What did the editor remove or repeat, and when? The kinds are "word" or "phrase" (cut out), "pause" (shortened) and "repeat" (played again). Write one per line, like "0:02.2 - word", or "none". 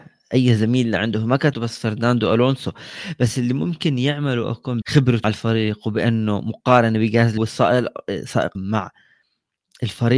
0:01.5 - word
0:04.8 - word
0:05.2 - word
0:07.4 - word
0:08.6 - word